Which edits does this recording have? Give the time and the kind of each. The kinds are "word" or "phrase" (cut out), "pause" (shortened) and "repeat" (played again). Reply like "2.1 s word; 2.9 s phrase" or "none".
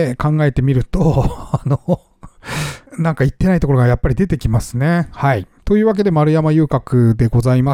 2.9 s pause